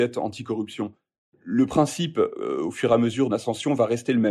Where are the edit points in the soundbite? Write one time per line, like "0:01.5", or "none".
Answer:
0:03.3